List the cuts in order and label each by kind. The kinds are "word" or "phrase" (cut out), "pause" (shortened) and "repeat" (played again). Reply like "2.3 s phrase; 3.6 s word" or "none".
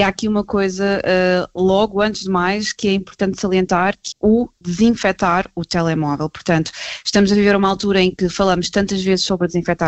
4.1 s word